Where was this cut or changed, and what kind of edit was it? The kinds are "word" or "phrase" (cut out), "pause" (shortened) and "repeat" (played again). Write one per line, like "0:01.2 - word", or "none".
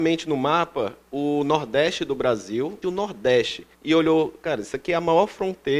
0:02.8 - phrase
0:03.7 - pause